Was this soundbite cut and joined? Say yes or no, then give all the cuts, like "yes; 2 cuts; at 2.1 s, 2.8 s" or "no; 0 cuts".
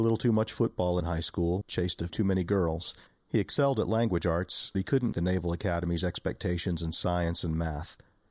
yes; 6 cuts; at 1.0 s, 1.6 s, 2.1 s, 3.1 s, 4.7 s, 5.1 s